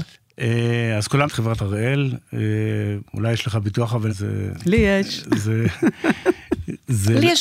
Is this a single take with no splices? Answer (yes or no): no